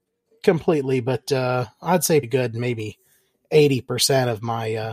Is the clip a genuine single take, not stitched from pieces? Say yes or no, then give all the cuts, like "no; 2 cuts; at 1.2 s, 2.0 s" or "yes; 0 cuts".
no; 1 cut; at 2.2 s